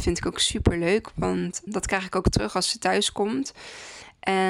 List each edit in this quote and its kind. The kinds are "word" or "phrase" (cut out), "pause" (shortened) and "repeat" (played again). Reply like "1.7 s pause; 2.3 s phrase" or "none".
1.7 s word